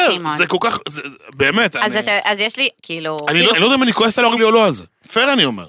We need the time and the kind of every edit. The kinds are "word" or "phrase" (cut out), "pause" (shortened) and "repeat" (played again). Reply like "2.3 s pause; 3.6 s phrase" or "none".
2.8 s word; 3.5 s word; 4.4 s word